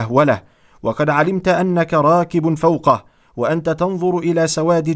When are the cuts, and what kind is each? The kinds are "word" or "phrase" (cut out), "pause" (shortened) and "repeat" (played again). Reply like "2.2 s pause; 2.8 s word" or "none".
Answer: none